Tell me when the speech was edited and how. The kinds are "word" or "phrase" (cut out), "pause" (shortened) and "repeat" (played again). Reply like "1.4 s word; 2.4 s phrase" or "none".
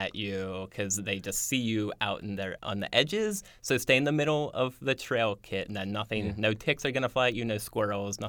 2.6 s phrase